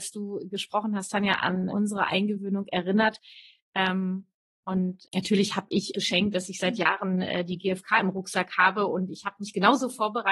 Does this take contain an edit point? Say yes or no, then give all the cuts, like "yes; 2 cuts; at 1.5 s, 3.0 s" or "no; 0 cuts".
yes; 3 cuts; at 1.7 s, 5.0 s, 5.9 s